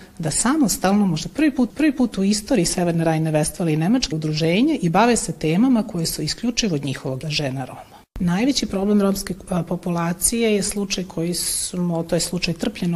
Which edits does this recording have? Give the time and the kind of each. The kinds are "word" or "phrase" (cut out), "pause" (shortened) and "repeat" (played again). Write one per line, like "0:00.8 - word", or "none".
0:01.7 - repeat
0:04.1 - word
0:07.2 - word
0:08.1 - pause